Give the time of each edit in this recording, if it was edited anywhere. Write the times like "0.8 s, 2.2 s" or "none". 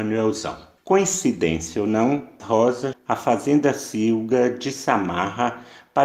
2.4 s, 2.9 s